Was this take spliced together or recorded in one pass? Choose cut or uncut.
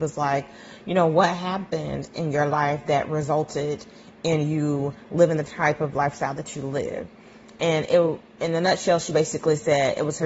uncut